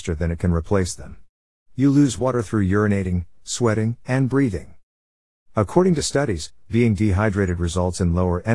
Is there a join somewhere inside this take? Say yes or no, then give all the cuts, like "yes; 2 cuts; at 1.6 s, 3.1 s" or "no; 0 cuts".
no; 0 cuts